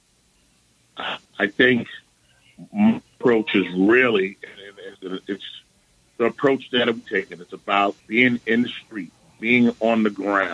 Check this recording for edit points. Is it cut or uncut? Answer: cut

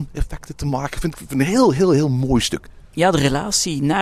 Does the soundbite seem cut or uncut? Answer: cut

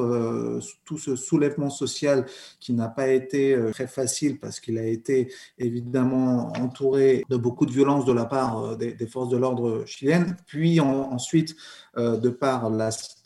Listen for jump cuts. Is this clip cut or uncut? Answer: uncut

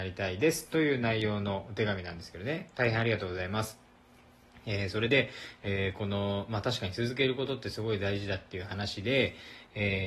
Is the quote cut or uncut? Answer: uncut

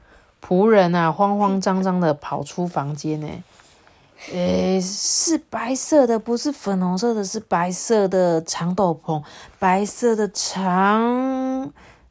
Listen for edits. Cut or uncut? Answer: uncut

